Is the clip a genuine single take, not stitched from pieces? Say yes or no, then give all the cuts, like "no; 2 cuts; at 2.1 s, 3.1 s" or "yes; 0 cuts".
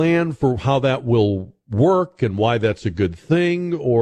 yes; 0 cuts